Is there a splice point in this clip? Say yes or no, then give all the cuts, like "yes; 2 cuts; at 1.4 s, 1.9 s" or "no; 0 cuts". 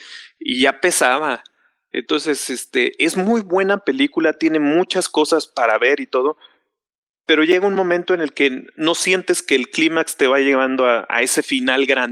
no; 0 cuts